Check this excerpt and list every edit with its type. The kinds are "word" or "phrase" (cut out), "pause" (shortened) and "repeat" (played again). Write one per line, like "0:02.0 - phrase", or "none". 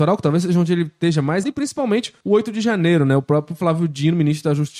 0:01.4 - word
0:02.2 - pause

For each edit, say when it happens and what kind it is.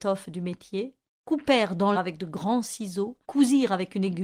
0:01.1 - pause
0:01.9 - word
0:03.2 - pause

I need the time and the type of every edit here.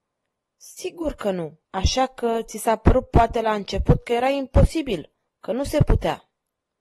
0:01.6 - pause

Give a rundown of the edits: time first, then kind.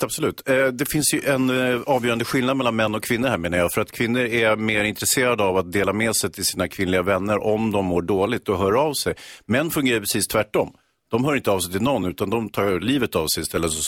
none

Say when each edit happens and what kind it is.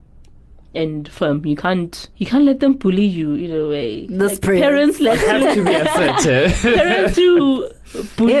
0:02.1 - pause
0:07.1 - word

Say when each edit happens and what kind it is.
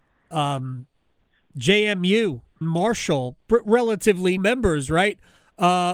0:02.6 - word
0:04.4 - word

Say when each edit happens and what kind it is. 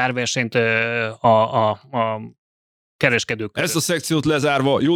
none

